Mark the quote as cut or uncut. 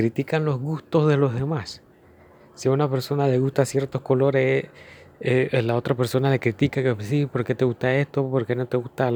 uncut